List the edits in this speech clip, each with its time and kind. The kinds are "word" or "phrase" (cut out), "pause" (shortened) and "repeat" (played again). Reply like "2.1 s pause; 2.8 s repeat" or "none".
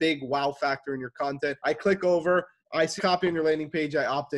1.6 s pause; 2.6 s pause; 3.0 s word